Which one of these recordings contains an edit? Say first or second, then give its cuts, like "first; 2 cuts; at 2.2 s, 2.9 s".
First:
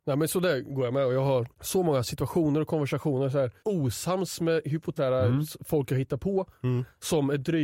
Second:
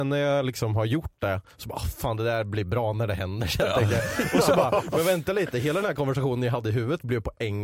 first; 3 cuts; at 1.5 s, 3.6 s, 5.0 s